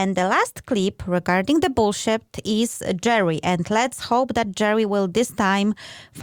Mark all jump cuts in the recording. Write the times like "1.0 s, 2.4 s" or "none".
none